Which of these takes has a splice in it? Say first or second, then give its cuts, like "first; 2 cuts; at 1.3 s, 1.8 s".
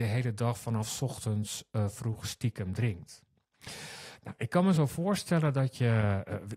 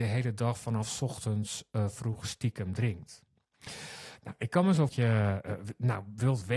second; 1 cut; at 4.9 s